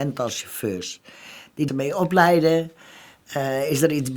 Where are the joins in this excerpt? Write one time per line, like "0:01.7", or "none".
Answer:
0:01.7